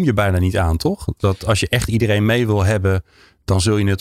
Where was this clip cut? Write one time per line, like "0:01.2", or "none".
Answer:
none

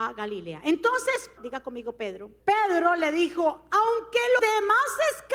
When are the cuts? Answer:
0:01.4
0:02.4
0:04.4

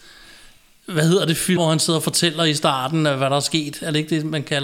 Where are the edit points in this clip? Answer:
0:01.6

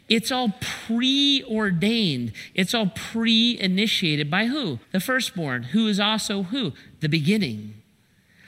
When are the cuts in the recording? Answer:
0:04.8

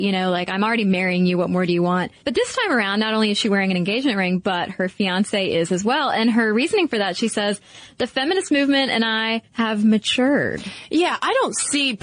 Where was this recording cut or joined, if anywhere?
0:02.2
0:09.5

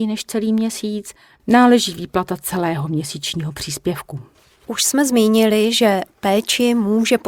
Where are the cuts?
none

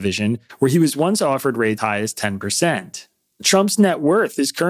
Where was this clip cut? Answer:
0:01.8

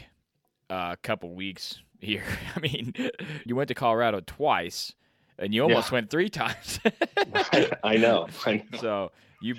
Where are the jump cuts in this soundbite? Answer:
0:03.5

